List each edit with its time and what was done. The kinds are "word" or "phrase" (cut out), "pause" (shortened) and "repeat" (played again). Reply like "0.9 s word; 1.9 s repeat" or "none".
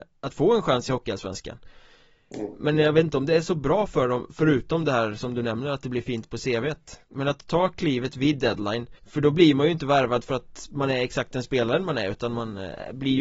7.0 s pause; 9.0 s pause